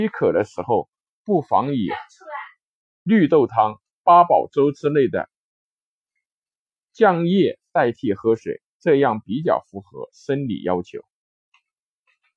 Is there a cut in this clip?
no; 0 cuts

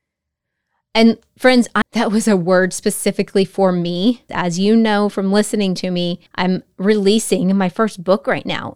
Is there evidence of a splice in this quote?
yes; 3 cuts; at 1.8 s, 4.3 s, 6.3 s

